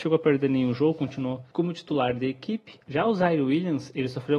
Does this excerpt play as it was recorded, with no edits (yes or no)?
yes